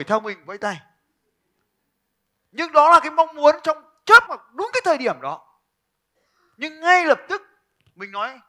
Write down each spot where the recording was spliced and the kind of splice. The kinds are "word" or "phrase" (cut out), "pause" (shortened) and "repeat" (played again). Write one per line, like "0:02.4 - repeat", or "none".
0:04.3 - word